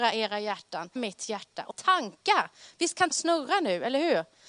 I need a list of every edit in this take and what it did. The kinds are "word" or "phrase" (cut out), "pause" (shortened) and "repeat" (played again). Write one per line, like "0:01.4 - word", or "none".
0:01.0 - word
0:01.7 - word
0:03.1 - word

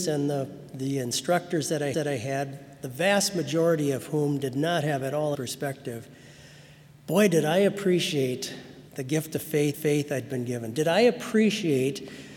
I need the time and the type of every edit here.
0:01.9 - repeat
0:05.3 - phrase
0:08.9 - pause
0:09.7 - repeat

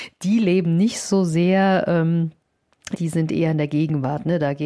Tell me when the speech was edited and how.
0:02.9 - phrase

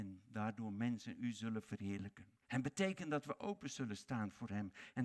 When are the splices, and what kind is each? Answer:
0:02.4 - pause

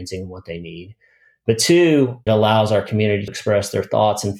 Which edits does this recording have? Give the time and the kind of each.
0:02.3 - word
0:03.3 - word

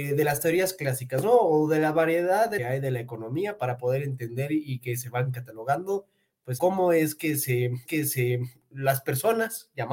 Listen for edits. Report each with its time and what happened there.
0:02.6 - phrase
0:06.6 - word
0:07.9 - repeat

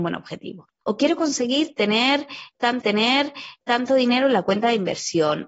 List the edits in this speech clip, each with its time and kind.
0:02.8 - repeat

